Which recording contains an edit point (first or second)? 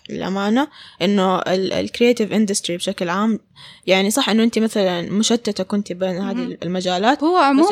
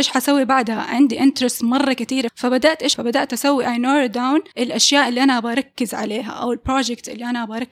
second